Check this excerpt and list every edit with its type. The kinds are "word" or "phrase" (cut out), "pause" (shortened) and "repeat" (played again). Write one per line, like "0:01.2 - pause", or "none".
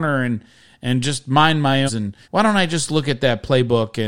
0:01.9 - phrase
0:02.2 - pause